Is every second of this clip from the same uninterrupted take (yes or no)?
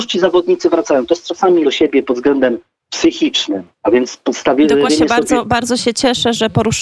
no